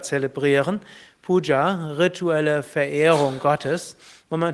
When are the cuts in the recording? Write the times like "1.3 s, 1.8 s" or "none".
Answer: none